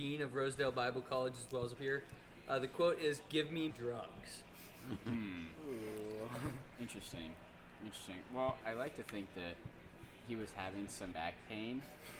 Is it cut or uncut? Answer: cut